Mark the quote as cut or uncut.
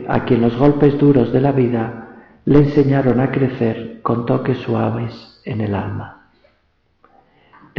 uncut